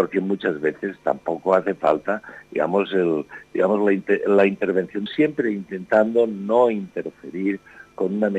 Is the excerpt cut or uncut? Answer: cut